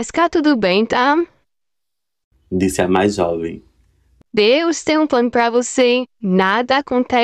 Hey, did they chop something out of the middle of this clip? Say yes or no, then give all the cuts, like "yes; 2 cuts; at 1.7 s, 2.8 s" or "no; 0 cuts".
no; 0 cuts